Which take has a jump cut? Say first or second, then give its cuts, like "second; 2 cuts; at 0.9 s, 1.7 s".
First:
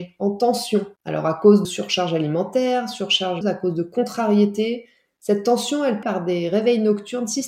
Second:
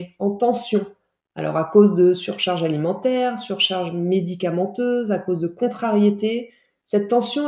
first; 4 cuts; at 1.0 s, 1.6 s, 3.4 s, 6.0 s